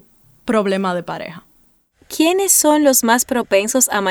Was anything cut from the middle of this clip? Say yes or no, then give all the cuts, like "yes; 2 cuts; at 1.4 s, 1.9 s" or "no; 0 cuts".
no; 0 cuts